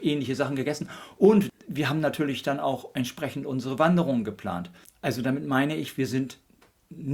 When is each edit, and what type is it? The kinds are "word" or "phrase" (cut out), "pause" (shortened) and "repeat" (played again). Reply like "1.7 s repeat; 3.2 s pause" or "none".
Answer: 4.8 s pause